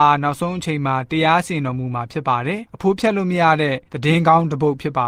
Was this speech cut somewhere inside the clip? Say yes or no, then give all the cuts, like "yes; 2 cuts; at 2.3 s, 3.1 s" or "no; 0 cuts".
yes; 1 cut; at 2.7 s